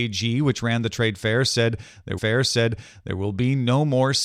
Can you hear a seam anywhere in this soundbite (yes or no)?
yes